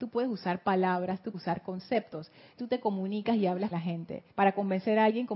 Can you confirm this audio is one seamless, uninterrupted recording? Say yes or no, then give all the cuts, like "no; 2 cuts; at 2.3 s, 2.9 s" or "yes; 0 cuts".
no; 4 cuts; at 1.3 s, 2.6 s, 3.7 s, 4.3 s